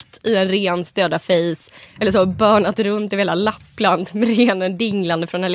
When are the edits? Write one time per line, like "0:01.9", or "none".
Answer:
none